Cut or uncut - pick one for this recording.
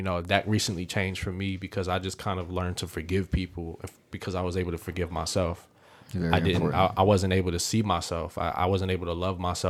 uncut